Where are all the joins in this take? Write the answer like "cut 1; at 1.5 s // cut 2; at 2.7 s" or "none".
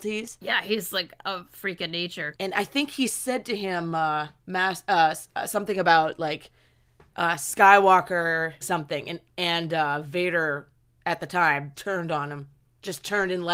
cut 1; at 8.6 s // cut 2; at 11.7 s